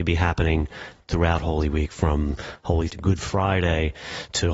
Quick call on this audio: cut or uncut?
cut